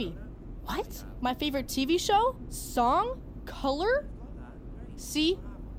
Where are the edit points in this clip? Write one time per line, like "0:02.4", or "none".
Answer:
none